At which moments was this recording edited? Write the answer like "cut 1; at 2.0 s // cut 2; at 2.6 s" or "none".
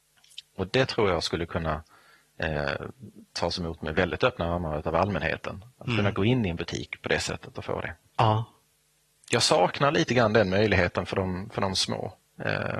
none